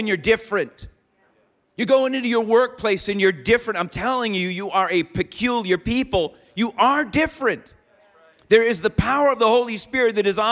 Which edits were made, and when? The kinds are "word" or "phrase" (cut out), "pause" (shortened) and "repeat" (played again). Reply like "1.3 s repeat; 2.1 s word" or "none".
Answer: none